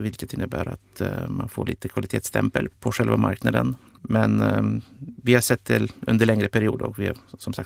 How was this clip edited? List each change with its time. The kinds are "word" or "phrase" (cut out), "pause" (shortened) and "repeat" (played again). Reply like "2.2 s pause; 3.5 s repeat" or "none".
2.7 s word